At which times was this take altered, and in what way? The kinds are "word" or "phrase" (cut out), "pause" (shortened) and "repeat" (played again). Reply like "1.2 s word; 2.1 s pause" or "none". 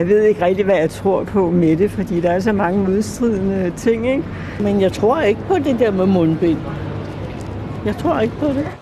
none